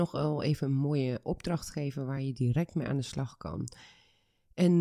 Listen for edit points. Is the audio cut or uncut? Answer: uncut